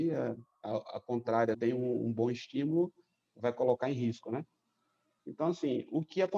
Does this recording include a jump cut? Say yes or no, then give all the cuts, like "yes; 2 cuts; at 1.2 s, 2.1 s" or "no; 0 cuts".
yes; 1 cut; at 1.5 s